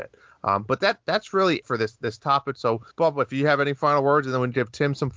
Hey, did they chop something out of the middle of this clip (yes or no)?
yes